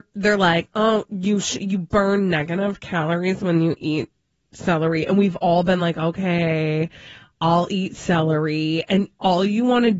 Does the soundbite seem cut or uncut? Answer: uncut